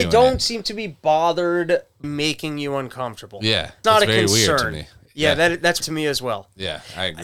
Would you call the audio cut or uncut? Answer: cut